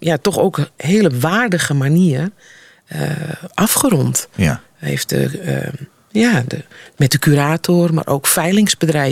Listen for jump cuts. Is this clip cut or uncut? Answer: uncut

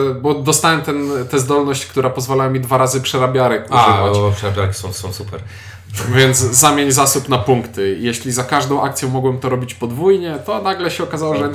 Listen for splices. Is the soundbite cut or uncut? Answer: cut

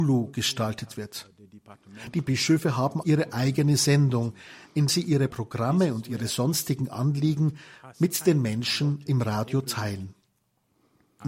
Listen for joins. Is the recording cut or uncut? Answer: cut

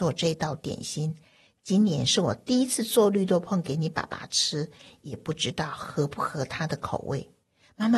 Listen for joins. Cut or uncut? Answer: uncut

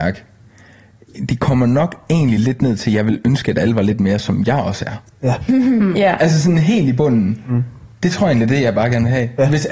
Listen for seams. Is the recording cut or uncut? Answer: uncut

